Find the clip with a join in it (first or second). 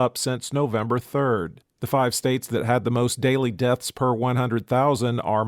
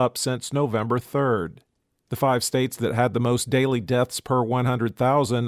first